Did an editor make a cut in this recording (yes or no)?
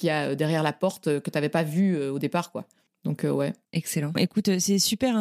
yes